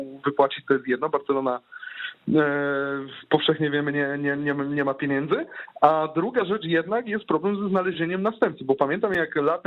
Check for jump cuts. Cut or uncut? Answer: uncut